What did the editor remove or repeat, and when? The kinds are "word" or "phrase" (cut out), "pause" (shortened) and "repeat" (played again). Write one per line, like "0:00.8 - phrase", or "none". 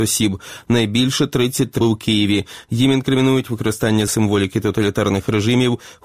0:01.8 - word
0:04.1 - word